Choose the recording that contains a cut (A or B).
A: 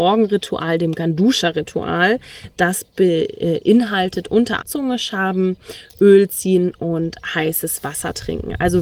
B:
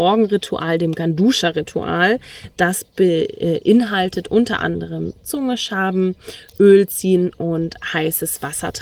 A